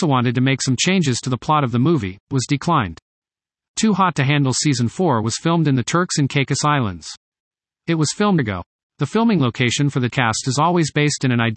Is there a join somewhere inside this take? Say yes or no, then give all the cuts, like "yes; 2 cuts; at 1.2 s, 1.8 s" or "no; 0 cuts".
yes; 3 cuts; at 2.3 s, 8.4 s, 10.1 s